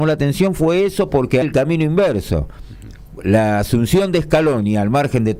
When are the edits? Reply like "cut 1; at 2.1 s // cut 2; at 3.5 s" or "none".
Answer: cut 1; at 1.4 s